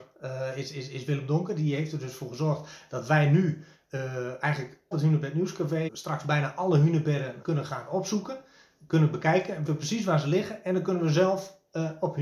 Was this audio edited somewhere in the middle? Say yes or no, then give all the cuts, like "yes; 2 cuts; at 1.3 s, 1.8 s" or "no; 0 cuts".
yes; 4 cuts; at 4.9 s, 5.9 s, 7.4 s, 9.7 s